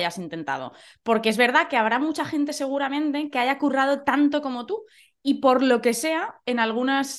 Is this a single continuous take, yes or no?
yes